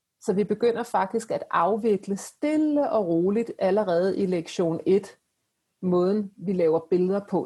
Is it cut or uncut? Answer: uncut